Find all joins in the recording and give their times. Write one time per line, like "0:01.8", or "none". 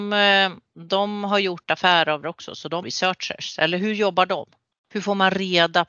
0:02.2
0:02.8
0:04.7